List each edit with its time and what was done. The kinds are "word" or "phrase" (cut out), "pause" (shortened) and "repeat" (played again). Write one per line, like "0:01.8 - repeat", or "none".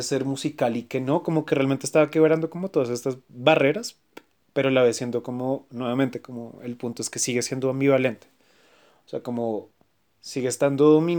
none